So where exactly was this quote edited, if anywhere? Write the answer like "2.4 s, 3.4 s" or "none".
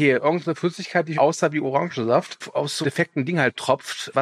1.2 s, 2.8 s